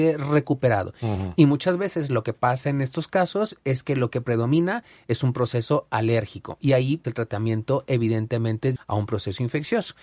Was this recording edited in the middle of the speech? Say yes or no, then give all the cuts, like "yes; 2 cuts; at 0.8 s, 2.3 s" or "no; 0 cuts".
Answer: yes; 2 cuts; at 7.0 s, 8.8 s